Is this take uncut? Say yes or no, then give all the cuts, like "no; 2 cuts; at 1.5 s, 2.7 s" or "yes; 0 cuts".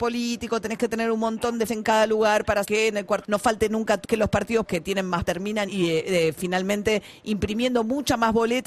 no; 7 cuts; at 1.7 s, 2.6 s, 3.2 s, 4.0 s, 4.7 s, 5.3 s, 5.7 s